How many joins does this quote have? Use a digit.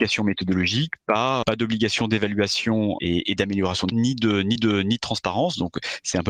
4